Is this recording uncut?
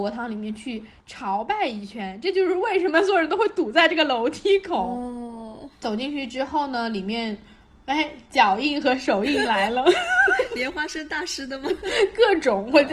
yes; 0 cuts

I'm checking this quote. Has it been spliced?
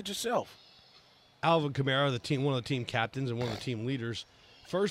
no; 0 cuts

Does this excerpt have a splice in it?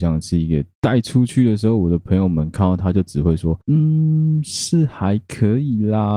yes; 1 cut; at 3.6 s

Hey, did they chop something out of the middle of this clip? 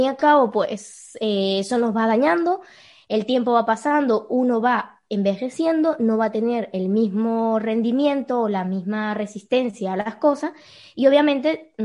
no; 0 cuts

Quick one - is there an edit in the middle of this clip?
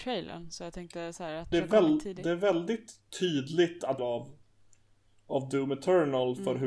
yes; 3 cuts; at 1.5 s, 3.1 s, 4.0 s

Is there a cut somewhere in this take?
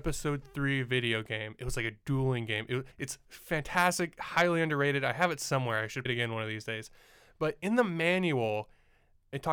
yes; 2 cuts; at 2.9 s, 6.1 s

